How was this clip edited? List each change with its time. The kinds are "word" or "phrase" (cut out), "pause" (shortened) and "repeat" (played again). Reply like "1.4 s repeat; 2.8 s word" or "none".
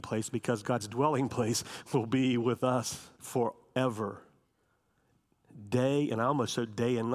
3.1 s pause